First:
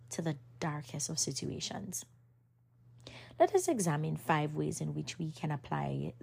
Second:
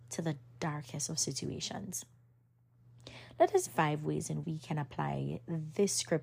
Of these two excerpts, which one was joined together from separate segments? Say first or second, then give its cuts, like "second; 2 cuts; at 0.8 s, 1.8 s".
second; 2 cuts; at 3.7 s, 4.4 s